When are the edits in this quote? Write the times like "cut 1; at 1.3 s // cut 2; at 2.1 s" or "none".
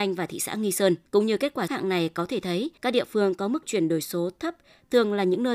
cut 1; at 1.1 s // cut 2; at 1.7 s // cut 3; at 2.8 s // cut 4; at 3.6 s

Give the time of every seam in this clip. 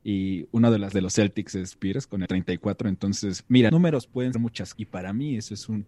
cut 1; at 0.9 s // cut 2; at 1.8 s // cut 3; at 2.3 s // cut 4; at 3.7 s // cut 5; at 4.3 s // cut 6; at 4.7 s

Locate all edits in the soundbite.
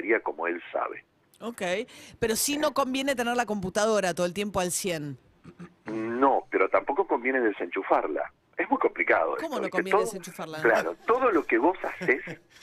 none

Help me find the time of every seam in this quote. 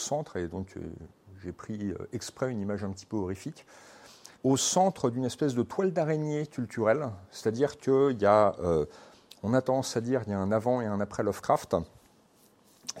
cut 1; at 4.3 s

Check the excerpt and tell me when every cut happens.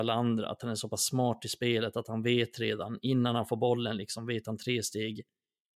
none

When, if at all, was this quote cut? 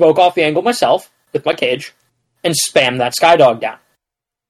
none

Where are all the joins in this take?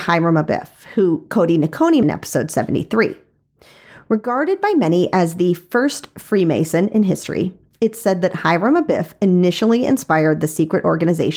cut 1; at 2.0 s

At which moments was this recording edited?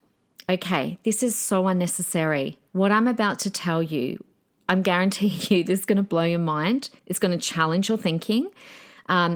cut 1; at 2.7 s // cut 2; at 7.0 s

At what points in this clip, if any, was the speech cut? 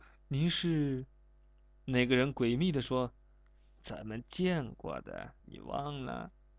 cut 1; at 5.4 s

